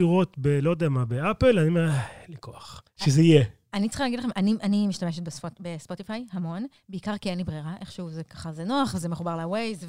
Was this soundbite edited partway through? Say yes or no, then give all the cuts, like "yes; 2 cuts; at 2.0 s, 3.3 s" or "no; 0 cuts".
yes; 1 cut; at 2.9 s